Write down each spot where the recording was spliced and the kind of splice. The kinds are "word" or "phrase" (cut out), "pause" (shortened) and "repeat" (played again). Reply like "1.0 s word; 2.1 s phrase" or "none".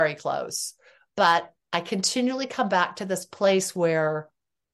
none